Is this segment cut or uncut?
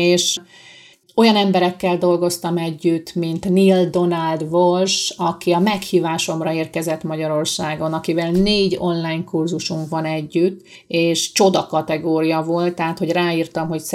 uncut